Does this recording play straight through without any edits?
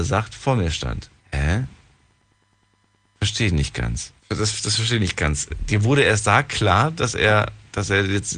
no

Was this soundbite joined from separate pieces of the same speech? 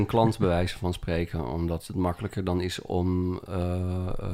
no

